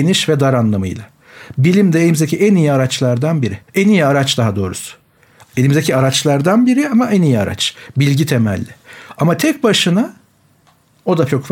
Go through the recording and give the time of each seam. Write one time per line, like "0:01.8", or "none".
0:03.6